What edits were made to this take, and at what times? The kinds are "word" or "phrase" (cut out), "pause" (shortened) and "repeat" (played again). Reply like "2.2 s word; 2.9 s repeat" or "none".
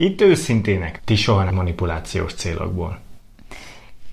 1.0 s word; 1.5 s word